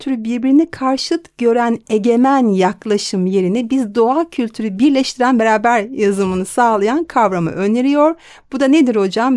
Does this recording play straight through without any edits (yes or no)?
yes